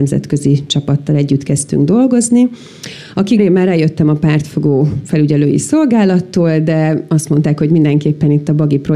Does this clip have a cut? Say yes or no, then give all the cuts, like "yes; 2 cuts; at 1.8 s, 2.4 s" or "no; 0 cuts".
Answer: yes; 1 cut; at 3.4 s